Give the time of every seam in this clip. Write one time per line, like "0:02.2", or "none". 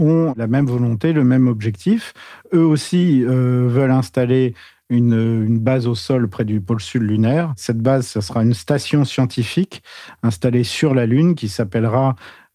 none